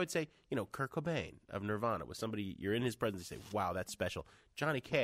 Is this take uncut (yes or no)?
yes